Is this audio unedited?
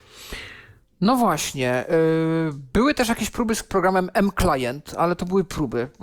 yes; 0 cuts

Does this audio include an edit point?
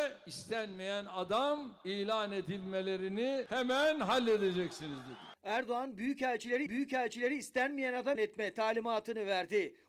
yes; 2 cuts; at 6.7 s, 8.2 s

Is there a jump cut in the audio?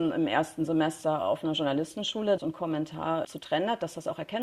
yes; 2 cuts; at 2.4 s, 3.2 s

